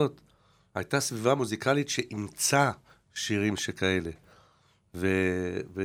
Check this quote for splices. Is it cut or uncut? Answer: uncut